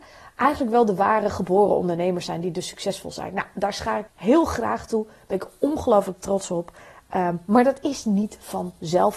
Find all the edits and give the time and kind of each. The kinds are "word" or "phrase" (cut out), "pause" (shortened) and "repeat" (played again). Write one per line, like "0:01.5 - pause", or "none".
0:04.1 - word